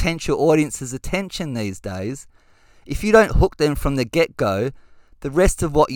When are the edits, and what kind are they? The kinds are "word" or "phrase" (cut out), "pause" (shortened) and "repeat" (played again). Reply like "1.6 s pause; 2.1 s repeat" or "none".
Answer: none